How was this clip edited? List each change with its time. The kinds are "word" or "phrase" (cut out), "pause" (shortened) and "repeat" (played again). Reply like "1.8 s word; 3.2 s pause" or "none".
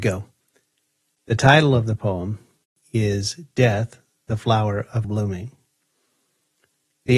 2.6 s pause; 5.0 s word

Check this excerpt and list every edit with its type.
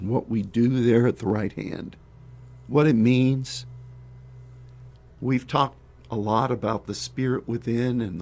none

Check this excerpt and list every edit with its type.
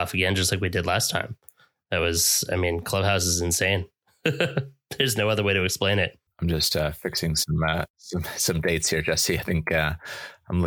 6.3 s pause

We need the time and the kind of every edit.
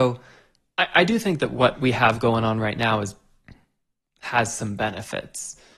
none

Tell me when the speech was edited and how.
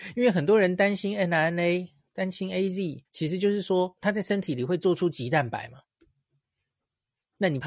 3.0 s pause

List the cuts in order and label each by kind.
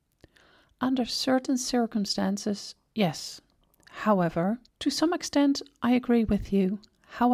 4.7 s pause

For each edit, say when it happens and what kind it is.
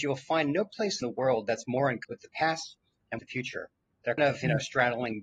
1.0 s word; 2.0 s word; 3.2 s word; 4.2 s word

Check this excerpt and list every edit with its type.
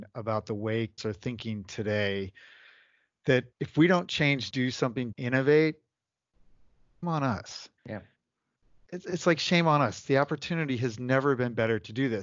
1.0 s word; 3.5 s pause; 4.5 s phrase; 5.1 s phrase; 7.0 s word; 7.8 s pause

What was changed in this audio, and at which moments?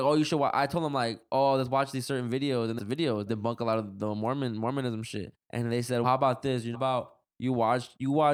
2.8 s phrase; 3.3 s word; 5.4 s pause; 6.0 s word; 6.7 s word

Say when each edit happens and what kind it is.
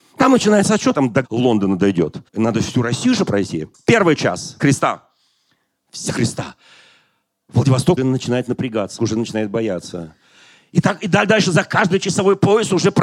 0.9 s phrase; 1.2 s word; 2.3 s pause; 3.7 s pause; 4.6 s word; 6.1 s phrase; 8.0 s word; 9.0 s word

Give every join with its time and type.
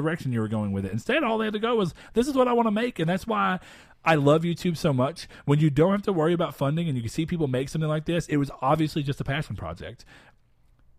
none

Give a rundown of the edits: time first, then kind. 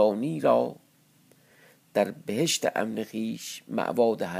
none

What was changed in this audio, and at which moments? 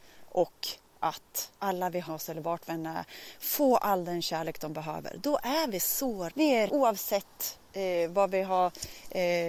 1.5 s pause; 2.1 s word; 6.3 s word; 6.7 s word

